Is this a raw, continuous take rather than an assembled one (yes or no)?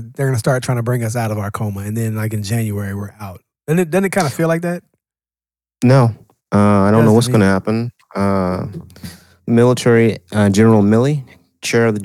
yes